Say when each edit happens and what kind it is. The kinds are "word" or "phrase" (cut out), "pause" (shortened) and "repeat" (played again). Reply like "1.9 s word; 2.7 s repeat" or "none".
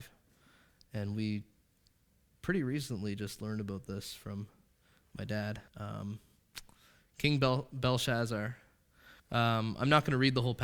5.7 s pause; 9.2 s pause